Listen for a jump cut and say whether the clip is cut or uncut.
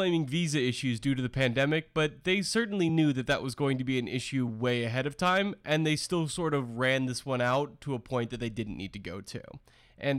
uncut